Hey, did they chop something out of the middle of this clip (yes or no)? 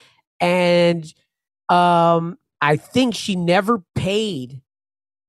no